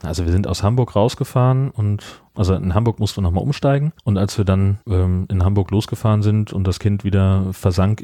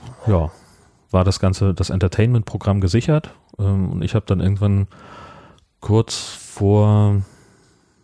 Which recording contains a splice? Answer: first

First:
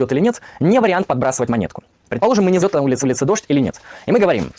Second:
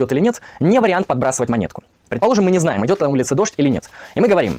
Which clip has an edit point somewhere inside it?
first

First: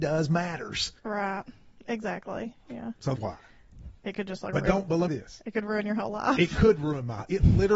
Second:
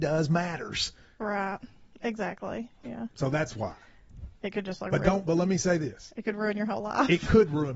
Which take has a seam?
first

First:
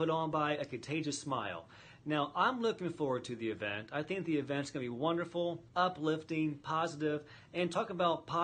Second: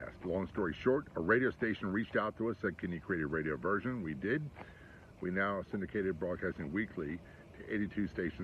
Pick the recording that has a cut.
first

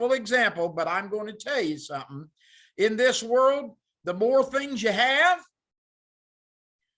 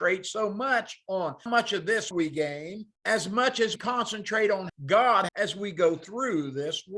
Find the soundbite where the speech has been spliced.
second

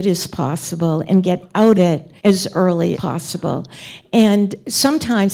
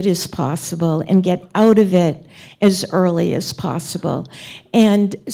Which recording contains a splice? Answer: first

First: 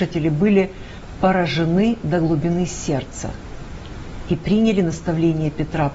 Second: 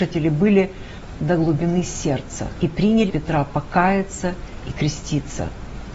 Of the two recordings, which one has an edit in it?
second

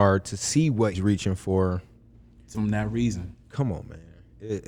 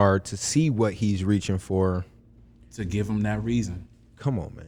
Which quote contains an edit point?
first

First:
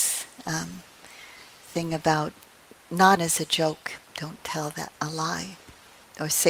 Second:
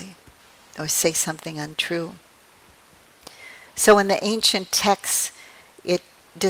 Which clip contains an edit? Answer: first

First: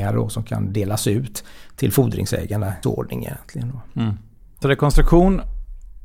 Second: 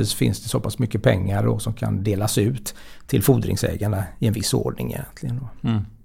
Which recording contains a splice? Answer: first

